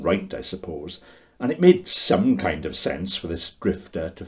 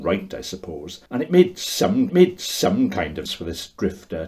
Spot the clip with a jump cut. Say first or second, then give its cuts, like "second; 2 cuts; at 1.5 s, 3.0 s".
second; 3 cuts; at 1.1 s, 2.1 s, 3.3 s